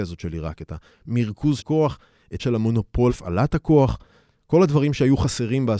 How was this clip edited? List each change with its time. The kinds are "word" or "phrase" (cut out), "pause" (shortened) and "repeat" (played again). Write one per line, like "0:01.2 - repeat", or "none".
0:01.6 - word
0:02.4 - word
0:03.1 - word